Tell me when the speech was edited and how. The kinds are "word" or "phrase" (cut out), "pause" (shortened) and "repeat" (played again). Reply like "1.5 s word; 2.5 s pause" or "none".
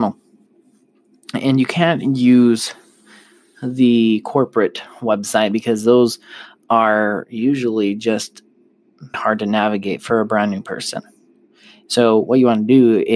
9.1 s word